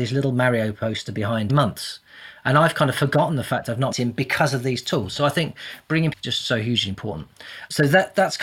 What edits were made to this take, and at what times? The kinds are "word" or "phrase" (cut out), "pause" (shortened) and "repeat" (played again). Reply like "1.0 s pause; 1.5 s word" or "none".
1.5 s phrase; 3.9 s word; 6.1 s phrase